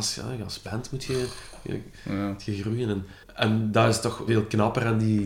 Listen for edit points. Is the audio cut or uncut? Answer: cut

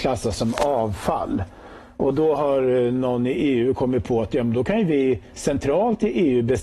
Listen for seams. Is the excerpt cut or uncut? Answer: uncut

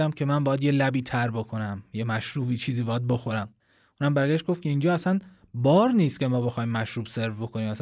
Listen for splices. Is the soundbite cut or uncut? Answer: uncut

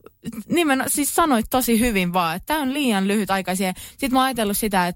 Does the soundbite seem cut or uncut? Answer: uncut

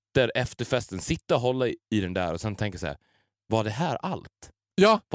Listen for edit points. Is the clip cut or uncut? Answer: uncut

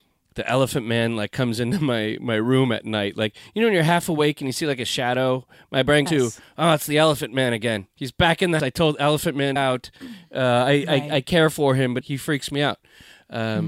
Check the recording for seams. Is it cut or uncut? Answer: cut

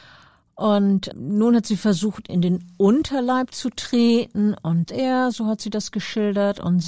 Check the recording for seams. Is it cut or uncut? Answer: cut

